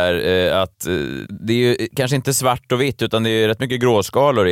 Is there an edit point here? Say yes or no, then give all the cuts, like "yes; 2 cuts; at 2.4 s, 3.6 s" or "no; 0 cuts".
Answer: yes; 1 cut; at 1.3 s